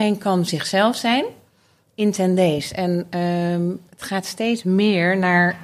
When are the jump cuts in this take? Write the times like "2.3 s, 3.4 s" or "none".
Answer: none